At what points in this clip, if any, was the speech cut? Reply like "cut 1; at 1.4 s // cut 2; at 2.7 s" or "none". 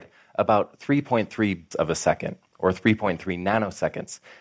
cut 1; at 1.7 s